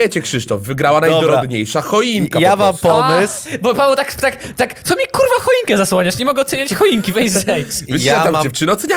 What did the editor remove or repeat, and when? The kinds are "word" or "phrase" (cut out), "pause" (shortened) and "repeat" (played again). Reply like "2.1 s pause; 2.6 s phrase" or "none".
none